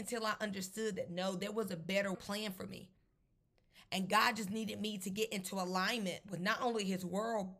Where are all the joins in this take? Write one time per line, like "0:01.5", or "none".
0:02.1

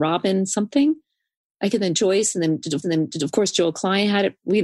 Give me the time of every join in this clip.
0:01.7
0:02.8

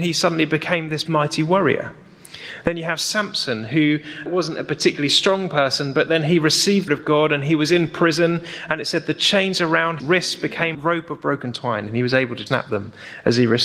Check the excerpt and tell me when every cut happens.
0:01.1
0:04.3
0:06.9
0:10.0
0:10.7
0:12.5

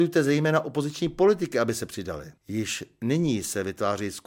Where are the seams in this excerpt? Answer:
0:02.4

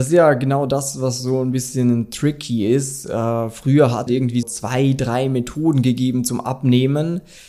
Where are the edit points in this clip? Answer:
0:04.1
0:04.4

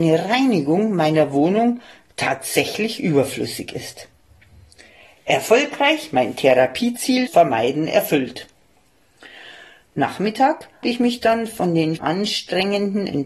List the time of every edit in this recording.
0:07.3
0:10.8
0:12.0

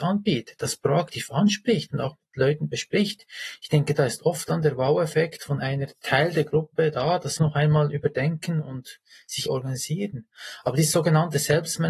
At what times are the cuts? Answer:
0:07.4
0:09.5

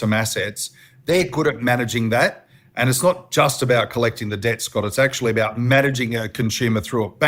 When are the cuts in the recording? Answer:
none

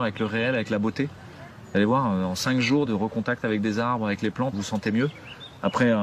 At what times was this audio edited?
0:02.9
0:04.5

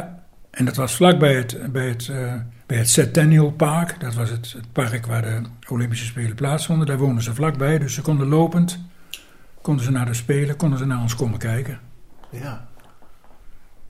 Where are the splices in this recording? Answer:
0:02.6
0:05.6

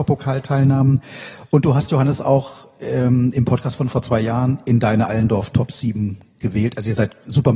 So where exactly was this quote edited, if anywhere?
none

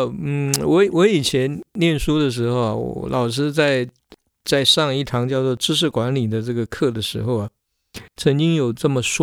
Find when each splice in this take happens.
none

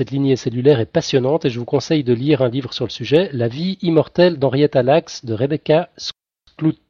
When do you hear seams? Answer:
none

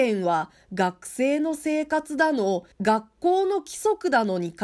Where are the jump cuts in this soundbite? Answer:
0:02.7

